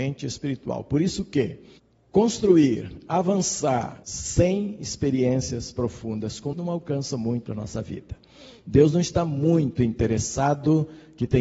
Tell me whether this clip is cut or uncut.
cut